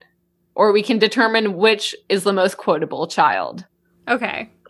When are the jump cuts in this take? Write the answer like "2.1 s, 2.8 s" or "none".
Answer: none